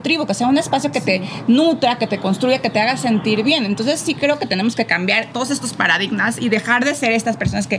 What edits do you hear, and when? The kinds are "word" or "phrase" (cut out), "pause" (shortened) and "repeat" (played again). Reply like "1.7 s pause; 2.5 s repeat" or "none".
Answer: none